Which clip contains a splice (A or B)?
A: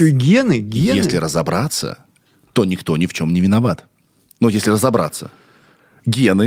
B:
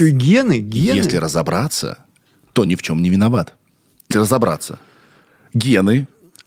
B